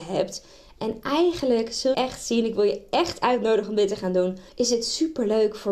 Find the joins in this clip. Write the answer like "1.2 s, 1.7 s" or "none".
1.9 s, 4.5 s